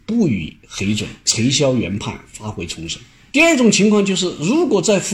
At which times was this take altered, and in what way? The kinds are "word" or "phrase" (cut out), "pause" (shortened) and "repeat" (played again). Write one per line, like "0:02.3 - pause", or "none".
none